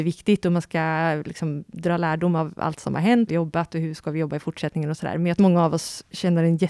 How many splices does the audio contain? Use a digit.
2